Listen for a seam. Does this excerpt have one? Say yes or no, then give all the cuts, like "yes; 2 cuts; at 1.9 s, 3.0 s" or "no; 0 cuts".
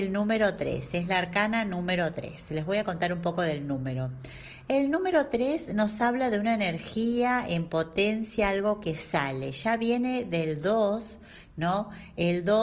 no; 0 cuts